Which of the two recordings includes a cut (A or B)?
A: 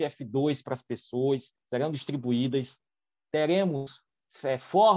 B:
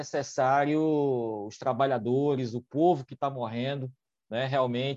A